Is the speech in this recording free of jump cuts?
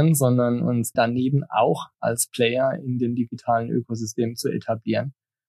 no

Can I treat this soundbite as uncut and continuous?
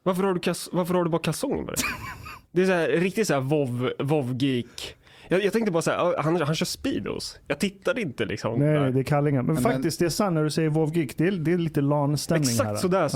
no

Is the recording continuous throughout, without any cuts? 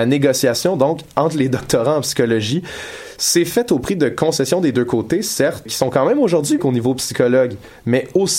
no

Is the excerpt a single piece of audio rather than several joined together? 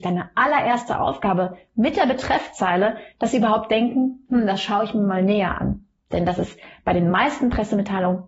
yes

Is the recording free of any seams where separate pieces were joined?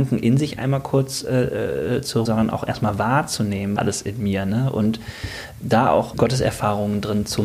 no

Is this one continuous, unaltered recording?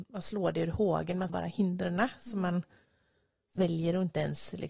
no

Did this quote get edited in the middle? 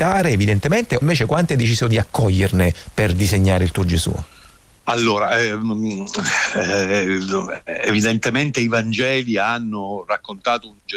yes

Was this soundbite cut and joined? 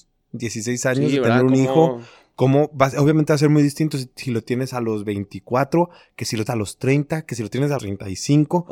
yes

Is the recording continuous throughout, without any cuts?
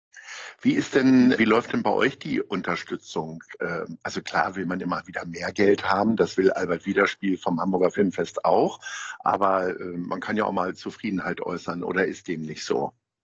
no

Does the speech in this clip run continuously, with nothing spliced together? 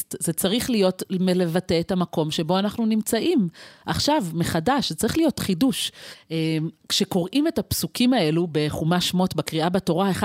yes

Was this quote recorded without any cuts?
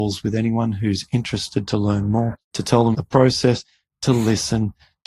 no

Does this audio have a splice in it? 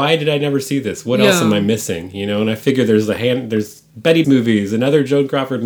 yes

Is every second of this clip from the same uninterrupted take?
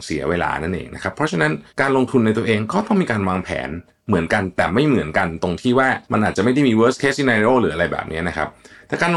no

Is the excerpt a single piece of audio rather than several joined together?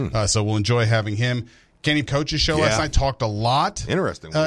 no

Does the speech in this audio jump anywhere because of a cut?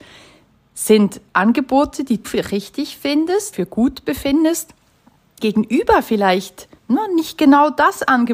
yes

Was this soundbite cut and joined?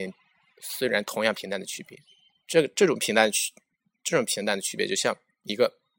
no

